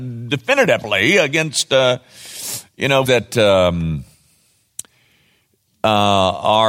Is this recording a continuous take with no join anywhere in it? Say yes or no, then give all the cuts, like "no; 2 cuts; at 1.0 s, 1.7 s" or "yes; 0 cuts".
no; 1 cut; at 3.1 s